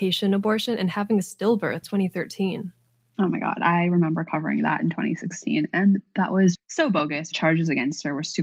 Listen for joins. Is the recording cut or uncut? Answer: cut